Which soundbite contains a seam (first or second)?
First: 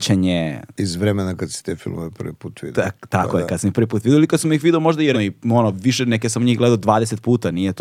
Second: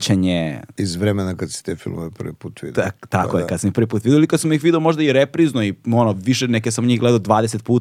first